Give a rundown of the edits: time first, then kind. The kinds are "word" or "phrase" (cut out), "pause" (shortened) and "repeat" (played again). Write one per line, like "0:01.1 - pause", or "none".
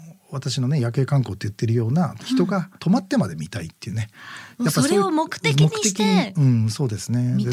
0:02.8 - pause